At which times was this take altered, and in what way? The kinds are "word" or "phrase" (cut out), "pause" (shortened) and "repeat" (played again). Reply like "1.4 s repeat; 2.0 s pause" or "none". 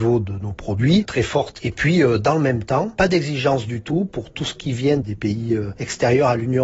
1.0 s phrase